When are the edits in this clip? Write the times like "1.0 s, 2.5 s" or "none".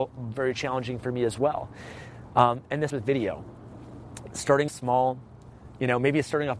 2.9 s, 4.7 s